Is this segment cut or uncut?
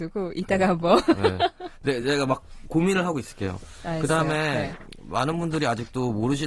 uncut